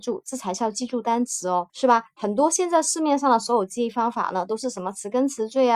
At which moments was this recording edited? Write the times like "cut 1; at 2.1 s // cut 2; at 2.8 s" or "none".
cut 1; at 1.7 s